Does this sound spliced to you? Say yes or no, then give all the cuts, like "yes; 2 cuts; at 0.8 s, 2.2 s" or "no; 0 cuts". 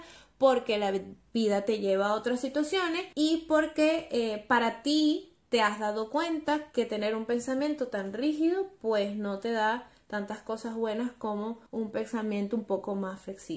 yes; 2 cuts; at 3.1 s, 11.7 s